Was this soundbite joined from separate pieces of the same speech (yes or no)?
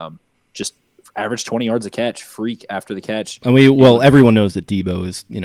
no